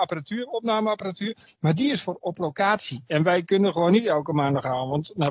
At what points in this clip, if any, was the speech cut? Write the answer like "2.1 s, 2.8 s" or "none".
none